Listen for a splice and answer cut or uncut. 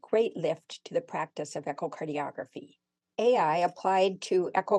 uncut